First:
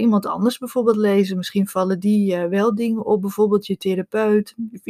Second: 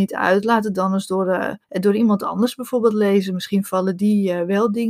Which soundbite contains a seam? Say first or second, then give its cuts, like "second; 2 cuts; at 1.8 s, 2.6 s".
second; 1 cut; at 1.6 s